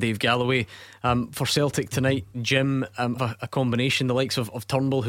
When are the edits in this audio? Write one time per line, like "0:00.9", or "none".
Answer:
0:02.3
0:03.2